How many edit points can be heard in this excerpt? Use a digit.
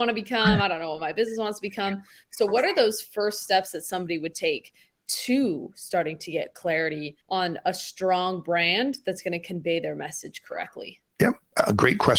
2